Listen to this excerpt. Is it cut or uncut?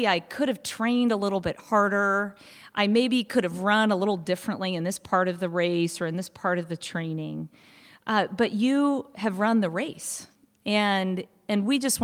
uncut